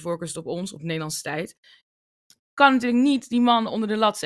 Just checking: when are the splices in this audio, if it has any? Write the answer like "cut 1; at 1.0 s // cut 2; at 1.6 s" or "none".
none